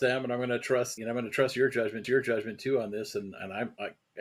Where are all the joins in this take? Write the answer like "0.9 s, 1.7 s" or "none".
1.0 s, 2.0 s